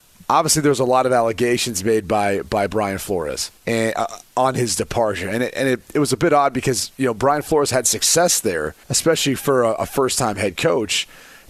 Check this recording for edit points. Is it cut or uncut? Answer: cut